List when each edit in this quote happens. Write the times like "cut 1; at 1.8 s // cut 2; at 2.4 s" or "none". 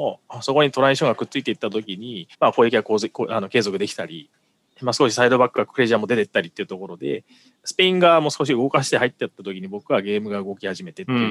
cut 1; at 2.3 s